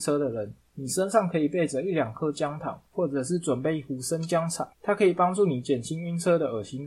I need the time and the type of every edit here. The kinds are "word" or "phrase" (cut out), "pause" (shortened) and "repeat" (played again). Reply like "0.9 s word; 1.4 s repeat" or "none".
2.9 s pause; 4.7 s pause